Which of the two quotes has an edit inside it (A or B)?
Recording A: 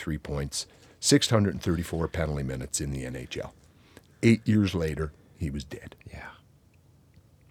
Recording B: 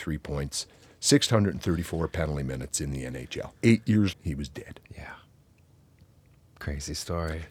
B